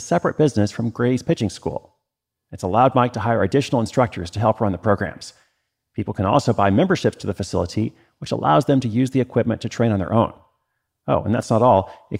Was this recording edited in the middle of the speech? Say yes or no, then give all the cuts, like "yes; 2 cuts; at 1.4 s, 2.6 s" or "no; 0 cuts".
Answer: no; 0 cuts